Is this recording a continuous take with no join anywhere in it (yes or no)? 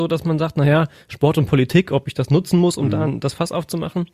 yes